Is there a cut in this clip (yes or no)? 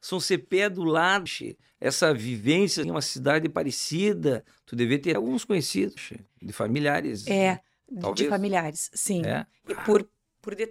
yes